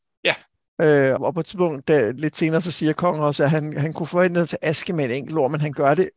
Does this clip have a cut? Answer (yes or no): yes